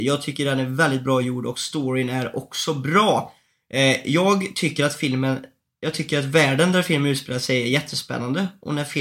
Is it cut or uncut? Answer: uncut